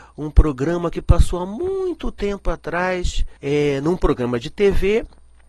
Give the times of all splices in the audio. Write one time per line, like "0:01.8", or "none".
0:03.4